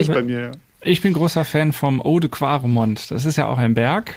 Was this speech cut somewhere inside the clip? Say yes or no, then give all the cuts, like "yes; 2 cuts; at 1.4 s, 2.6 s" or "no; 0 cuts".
no; 0 cuts